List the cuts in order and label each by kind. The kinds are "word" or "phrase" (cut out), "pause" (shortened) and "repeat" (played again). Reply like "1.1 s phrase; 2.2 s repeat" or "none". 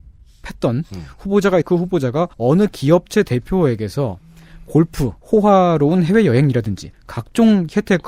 1.6 s word; 2.3 s pause; 5.2 s pause; 6.9 s word